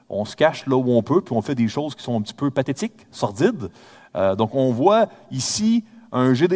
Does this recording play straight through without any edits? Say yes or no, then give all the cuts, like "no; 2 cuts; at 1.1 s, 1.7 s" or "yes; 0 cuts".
yes; 0 cuts